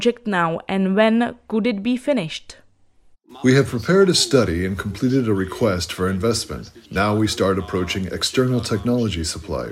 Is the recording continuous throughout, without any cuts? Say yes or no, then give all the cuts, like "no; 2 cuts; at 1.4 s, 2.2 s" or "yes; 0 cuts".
no; 1 cut; at 6.8 s